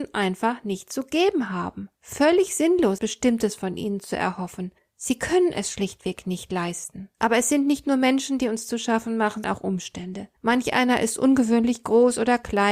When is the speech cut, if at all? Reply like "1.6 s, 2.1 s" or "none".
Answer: 1.9 s, 3.0 s, 4.8 s, 7.1 s, 9.4 s, 10.4 s